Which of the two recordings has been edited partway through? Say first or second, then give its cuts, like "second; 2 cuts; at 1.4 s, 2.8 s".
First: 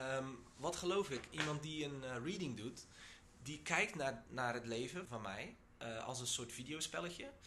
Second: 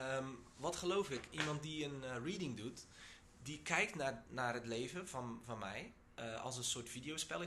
first; 1 cut; at 5.1 s